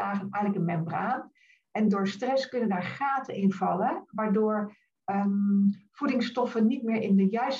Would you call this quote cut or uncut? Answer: uncut